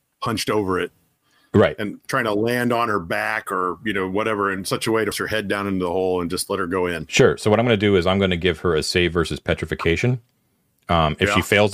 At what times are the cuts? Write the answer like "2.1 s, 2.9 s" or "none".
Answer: 5.1 s